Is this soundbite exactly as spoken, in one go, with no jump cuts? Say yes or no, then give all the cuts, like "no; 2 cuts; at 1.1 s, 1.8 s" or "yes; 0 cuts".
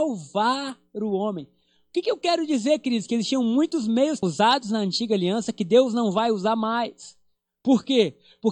no; 1 cut; at 4.2 s